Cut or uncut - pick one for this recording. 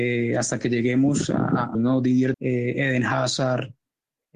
cut